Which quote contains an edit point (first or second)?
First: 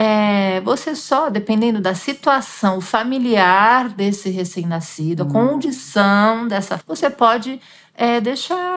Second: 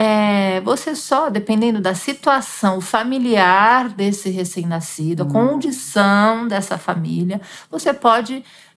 first